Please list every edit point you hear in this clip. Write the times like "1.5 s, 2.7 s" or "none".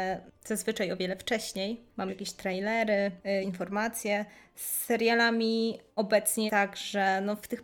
2.1 s, 3.4 s, 6.5 s